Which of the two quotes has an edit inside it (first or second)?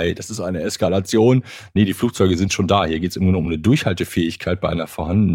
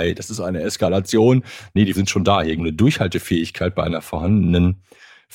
second